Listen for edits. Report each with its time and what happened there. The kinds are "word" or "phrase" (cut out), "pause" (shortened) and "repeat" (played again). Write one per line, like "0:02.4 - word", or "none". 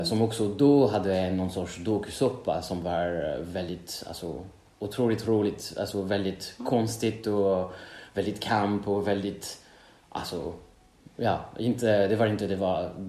none